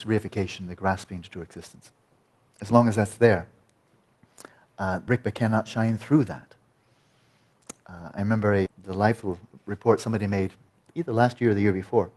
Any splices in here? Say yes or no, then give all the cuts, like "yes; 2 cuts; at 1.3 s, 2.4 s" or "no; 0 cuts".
yes; 2 cuts; at 5.1 s, 8.7 s